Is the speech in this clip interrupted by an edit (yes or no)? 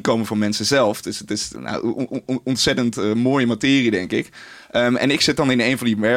no